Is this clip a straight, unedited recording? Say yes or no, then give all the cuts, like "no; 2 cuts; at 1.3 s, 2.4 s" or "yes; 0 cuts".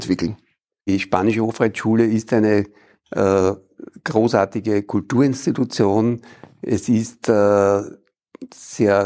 yes; 0 cuts